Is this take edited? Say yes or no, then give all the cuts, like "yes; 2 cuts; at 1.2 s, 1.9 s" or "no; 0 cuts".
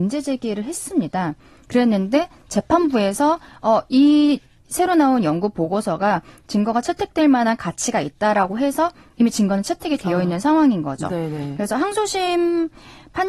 no; 0 cuts